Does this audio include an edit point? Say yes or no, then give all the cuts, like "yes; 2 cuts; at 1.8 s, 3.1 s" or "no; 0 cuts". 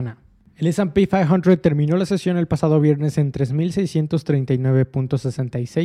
no; 0 cuts